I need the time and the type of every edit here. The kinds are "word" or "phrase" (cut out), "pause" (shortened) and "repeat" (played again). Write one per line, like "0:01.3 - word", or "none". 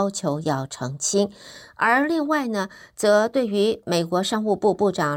none